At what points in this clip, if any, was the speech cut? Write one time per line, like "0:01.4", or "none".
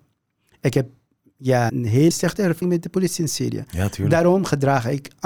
0:01.7
0:02.1
0:02.6